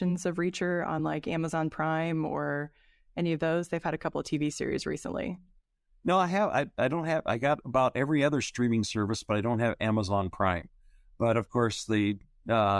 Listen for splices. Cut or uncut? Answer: uncut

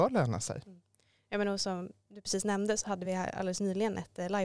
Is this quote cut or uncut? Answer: uncut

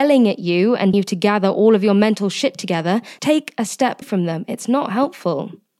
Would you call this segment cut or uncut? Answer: cut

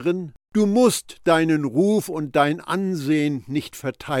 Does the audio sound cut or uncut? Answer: uncut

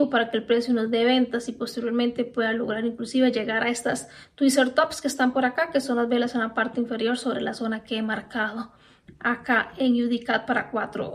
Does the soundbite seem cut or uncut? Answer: uncut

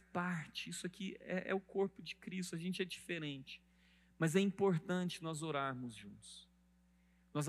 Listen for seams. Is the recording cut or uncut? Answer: uncut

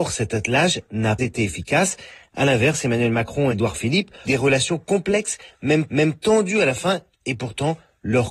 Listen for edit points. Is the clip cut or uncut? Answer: cut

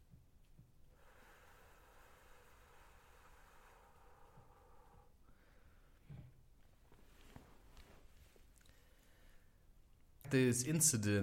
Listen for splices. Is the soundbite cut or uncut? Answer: cut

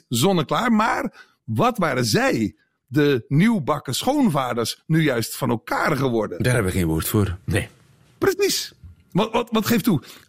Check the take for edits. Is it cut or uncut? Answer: uncut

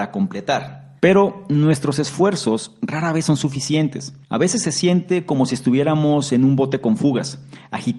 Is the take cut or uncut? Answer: cut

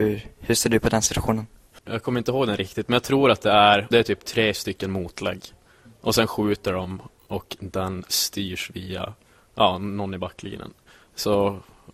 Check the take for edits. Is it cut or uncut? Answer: cut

